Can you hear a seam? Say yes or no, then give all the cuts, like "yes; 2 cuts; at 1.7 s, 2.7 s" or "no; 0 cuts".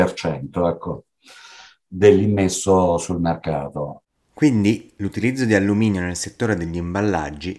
no; 0 cuts